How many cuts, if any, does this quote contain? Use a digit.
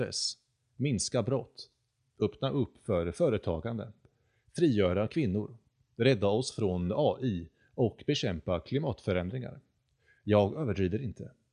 0